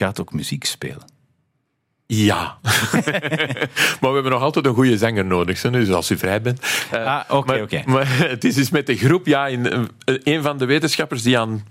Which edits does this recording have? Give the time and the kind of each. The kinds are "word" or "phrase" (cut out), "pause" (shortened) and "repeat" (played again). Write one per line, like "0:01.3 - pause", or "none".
none